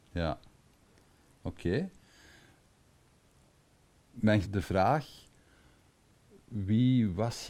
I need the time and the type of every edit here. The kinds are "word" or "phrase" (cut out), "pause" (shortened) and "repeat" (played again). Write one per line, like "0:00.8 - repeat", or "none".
0:04.4 - phrase